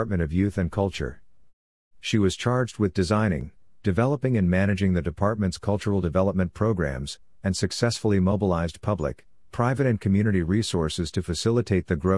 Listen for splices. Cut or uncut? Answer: uncut